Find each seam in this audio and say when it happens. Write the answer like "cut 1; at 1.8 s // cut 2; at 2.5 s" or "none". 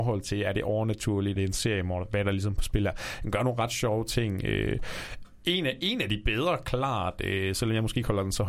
cut 1; at 1.4 s